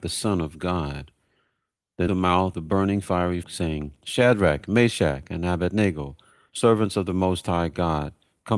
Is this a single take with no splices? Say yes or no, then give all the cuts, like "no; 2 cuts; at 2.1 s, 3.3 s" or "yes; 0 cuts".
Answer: no; 3 cuts; at 2.1 s, 2.5 s, 3.4 s